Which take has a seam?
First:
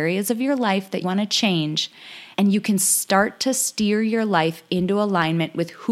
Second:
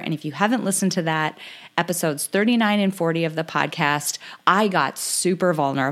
first; 2 cuts; at 1.0 s, 2.3 s

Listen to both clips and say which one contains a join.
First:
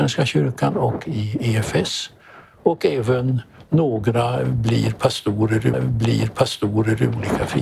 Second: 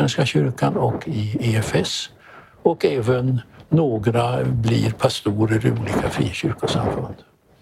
first; 1 cut; at 5.7 s

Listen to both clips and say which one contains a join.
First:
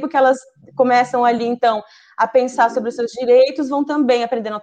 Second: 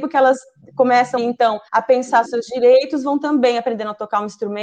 second; 3 cuts; at 1.2 s, 1.7 s, 2.2 s

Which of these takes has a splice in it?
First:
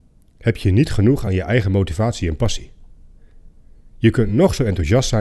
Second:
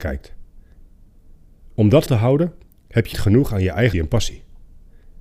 second; 4 cuts; at 2.1 s, 2.7 s, 3.1 s, 3.9 s

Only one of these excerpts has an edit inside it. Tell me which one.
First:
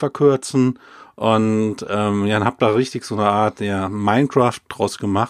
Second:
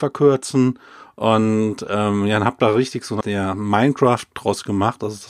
second; 1 cut; at 3.2 s

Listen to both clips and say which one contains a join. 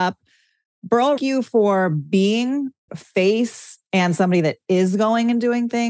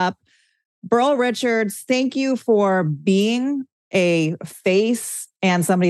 first; 2 cuts; at 1.2 s, 2.9 s

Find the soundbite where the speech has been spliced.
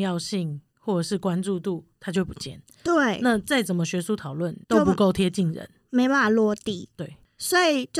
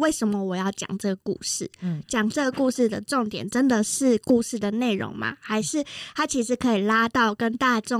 first; 1 cut; at 4.6 s

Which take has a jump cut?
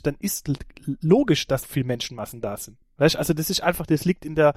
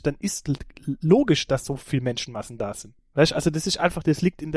first; 1 cut; at 1.6 s

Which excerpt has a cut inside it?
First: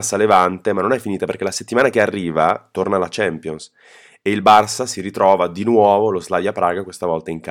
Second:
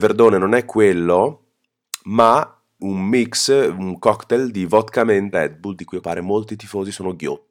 second; 3 cuts; at 2.8 s, 5.3 s, 6.0 s

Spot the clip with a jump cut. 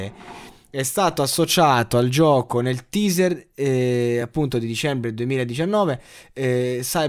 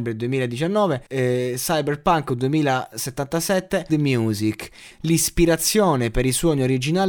second; 3 cuts; at 1.1 s, 3.9 s, 4.9 s

